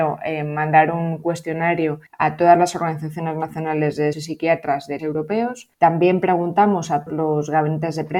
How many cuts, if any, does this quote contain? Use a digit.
5